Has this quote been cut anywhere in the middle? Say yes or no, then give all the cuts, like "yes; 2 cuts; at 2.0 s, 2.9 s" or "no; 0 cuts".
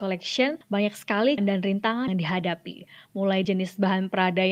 yes; 3 cuts; at 1.4 s, 2.1 s, 3.4 s